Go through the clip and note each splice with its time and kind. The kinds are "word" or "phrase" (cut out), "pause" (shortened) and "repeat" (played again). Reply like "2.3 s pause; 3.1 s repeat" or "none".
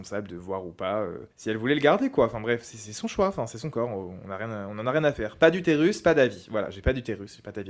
1.3 s pause